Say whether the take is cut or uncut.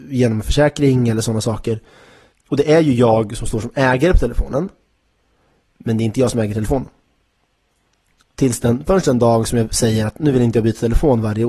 uncut